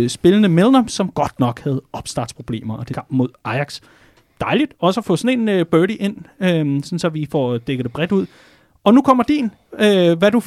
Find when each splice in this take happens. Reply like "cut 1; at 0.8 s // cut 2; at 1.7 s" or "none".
cut 1; at 2.9 s